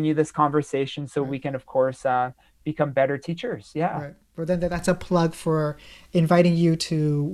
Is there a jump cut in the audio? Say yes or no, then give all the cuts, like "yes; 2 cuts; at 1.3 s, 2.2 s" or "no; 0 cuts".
no; 0 cuts